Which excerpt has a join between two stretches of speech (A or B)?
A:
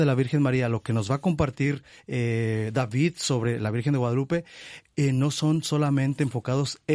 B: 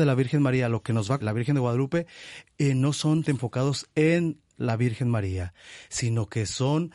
B